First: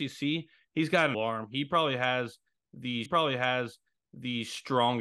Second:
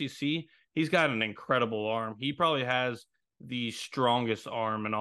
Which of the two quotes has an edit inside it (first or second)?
first